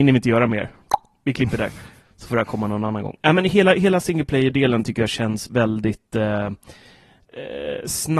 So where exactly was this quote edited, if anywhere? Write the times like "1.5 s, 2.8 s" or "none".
none